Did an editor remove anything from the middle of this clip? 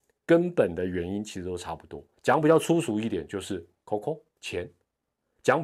yes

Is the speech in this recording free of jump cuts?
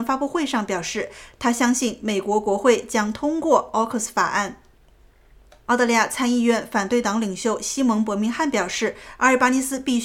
yes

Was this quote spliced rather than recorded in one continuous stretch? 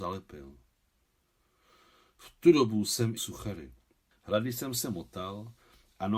yes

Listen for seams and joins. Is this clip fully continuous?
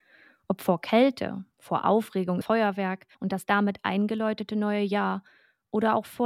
no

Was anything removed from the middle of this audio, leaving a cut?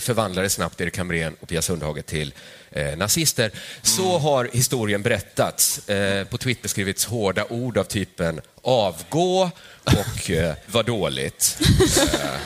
yes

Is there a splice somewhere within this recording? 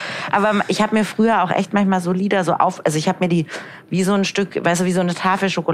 no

